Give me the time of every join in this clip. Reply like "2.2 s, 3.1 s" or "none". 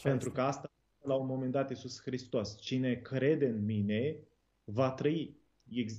none